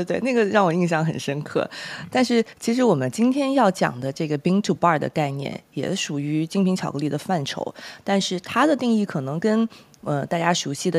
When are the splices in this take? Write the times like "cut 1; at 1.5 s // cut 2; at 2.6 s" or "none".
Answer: none